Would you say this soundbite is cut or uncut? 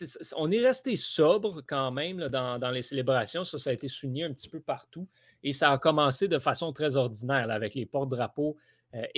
uncut